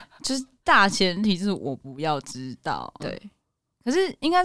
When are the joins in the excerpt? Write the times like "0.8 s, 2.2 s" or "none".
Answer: 3.0 s